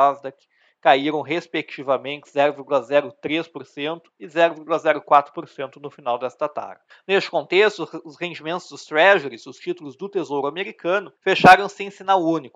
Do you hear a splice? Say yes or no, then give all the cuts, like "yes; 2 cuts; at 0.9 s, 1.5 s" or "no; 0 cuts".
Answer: yes; 3 cuts; at 4.1 s, 6.9 s, 11.2 s